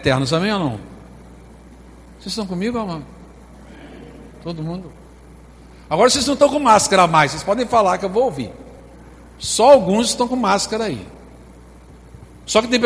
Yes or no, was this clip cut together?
no